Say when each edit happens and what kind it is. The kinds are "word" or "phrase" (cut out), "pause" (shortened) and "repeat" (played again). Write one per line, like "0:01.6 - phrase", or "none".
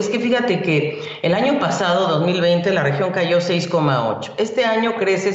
none